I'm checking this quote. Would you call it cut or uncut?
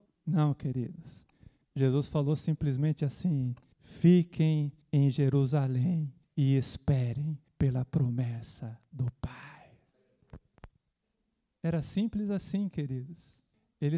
uncut